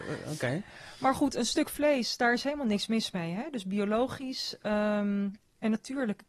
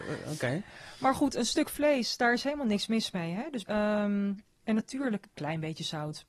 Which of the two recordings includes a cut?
second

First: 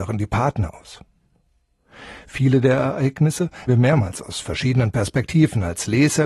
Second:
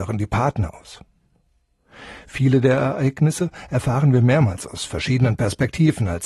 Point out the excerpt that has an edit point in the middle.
first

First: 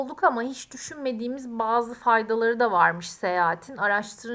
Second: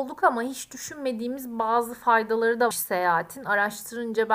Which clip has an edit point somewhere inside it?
second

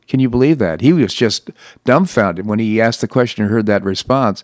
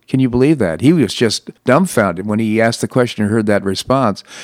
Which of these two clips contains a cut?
second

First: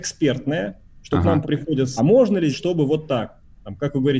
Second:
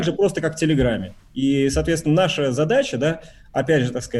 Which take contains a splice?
first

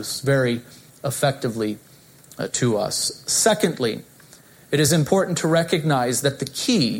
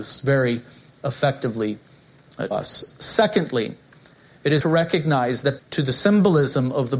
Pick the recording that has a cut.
second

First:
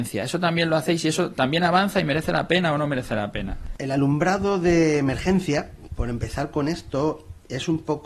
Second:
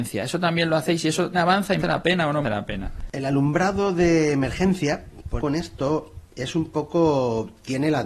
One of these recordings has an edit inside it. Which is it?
second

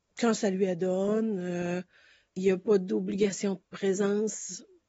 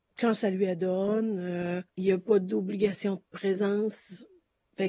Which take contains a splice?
second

